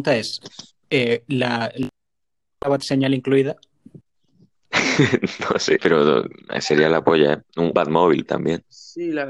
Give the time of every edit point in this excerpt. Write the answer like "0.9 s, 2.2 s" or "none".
2.2 s, 4.0 s, 5.8 s, 7.7 s, 8.3 s

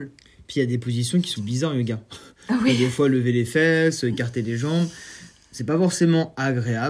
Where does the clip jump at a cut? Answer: 1.4 s

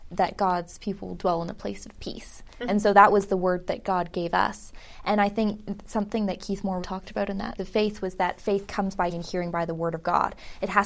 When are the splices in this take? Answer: 6.8 s, 7.6 s, 9.1 s

